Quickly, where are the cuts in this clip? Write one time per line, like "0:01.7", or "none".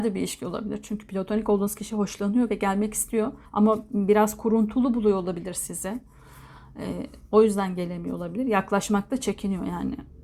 0:03.5